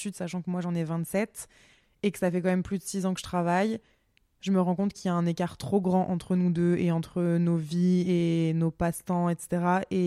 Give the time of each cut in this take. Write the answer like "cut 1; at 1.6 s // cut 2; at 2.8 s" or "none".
none